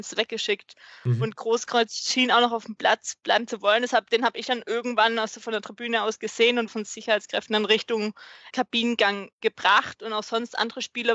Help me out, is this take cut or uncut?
cut